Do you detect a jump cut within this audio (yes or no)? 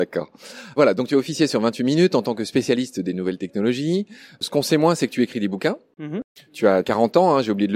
no